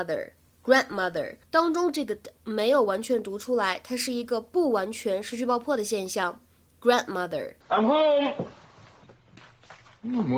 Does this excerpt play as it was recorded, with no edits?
no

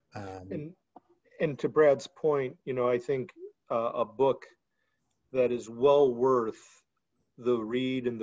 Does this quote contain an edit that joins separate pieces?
no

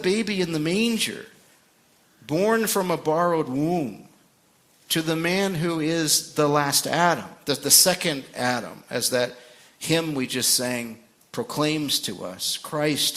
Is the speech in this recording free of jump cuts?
yes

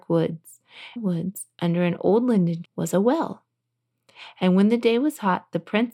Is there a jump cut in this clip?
yes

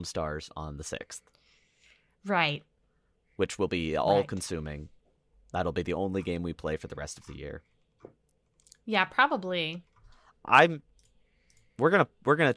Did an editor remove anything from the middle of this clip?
no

